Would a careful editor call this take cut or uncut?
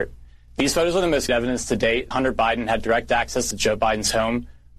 cut